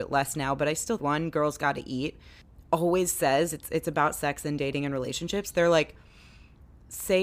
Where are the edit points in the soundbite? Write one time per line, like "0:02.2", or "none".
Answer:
0:01.0